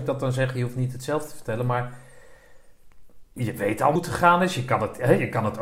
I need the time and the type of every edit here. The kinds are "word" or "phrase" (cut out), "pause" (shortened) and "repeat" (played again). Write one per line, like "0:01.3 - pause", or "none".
0:04.0 - word